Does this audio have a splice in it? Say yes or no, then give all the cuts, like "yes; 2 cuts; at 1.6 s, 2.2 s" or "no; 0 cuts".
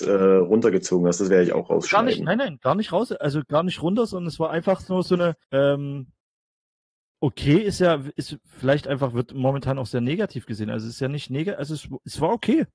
yes; 1 cut; at 5.4 s